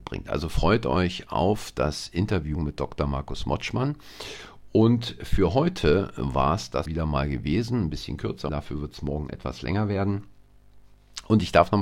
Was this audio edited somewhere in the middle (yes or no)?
yes